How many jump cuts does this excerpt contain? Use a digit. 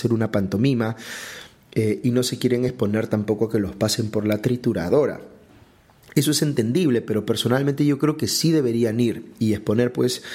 0